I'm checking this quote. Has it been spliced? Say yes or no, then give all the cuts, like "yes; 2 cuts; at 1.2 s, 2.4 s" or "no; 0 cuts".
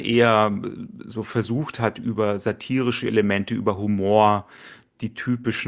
no; 0 cuts